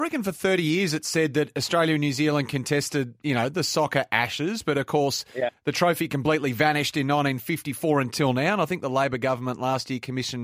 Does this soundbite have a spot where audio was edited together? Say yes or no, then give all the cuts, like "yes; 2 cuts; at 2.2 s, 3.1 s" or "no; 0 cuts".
no; 0 cuts